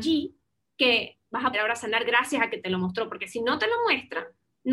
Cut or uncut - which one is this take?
cut